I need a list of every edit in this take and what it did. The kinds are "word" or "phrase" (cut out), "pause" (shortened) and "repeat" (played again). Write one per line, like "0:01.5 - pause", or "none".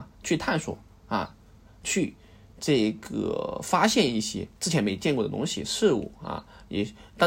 0:04.6 - word